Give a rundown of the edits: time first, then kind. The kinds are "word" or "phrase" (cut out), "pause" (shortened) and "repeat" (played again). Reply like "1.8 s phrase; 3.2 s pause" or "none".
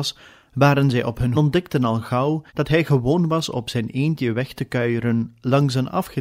1.3 s phrase; 2.5 s pause